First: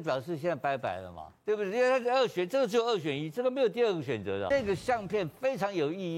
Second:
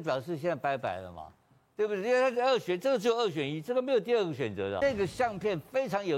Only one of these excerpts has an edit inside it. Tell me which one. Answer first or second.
first